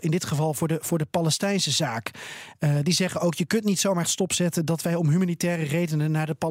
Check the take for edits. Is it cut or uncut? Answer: cut